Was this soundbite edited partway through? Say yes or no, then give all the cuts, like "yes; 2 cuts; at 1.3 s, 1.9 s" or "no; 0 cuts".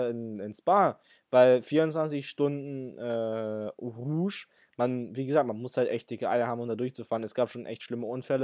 no; 0 cuts